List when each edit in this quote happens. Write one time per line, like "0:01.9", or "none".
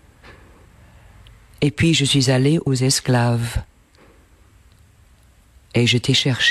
0:02.7